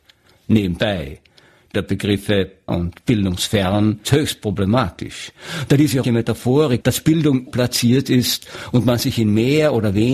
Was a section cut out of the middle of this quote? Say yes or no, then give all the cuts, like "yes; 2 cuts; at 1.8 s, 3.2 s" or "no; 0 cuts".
yes; 6 cuts; at 1.7 s, 2.7 s, 4.0 s, 6.0 s, 6.8 s, 7.5 s